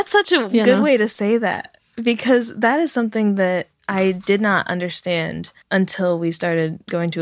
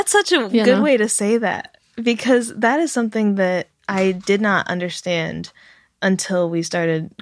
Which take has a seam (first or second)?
first